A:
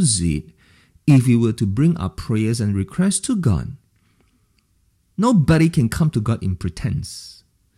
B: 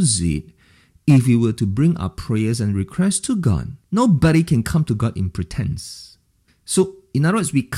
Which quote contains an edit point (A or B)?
B